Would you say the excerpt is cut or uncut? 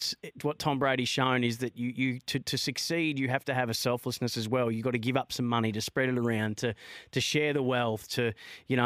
uncut